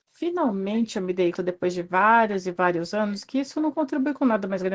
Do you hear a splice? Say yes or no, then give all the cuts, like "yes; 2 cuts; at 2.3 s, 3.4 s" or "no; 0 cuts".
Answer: yes; 1 cut; at 1.3 s